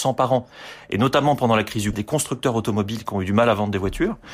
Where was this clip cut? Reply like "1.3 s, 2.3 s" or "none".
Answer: 1.9 s